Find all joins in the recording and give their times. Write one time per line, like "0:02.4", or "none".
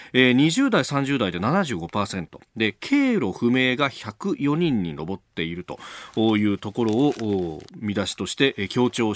0:07.7